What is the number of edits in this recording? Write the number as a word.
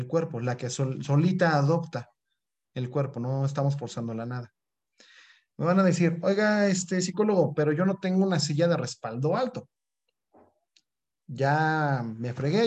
zero